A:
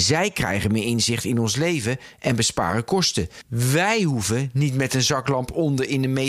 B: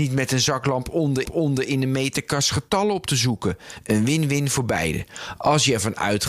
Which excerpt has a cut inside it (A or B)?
B